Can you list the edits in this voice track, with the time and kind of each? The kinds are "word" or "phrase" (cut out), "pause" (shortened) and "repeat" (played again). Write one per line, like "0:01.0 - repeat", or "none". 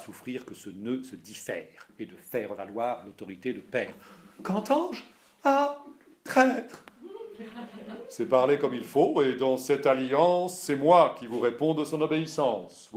none